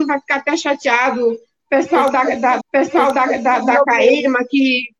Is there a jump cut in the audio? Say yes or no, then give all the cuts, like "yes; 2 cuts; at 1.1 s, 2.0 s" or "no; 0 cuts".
yes; 1 cut; at 2.6 s